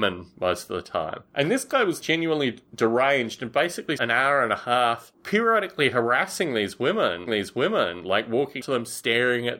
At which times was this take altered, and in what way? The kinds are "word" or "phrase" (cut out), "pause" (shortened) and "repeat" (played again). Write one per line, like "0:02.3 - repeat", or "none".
0:01.3 - pause
0:02.0 - word
0:04.0 - phrase
0:05.1 - word
0:07.3 - repeat
0:08.6 - word